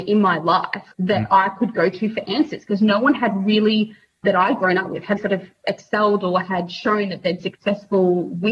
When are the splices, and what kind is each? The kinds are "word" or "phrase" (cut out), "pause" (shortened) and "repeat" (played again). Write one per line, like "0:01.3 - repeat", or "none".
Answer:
0:00.9 - pause
0:04.2 - word
0:05.2 - word
0:07.4 - word